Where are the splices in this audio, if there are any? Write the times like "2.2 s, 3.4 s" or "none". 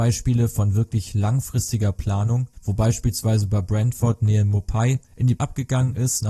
2.5 s, 5.1 s, 5.4 s